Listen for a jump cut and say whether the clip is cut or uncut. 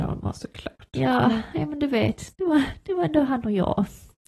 uncut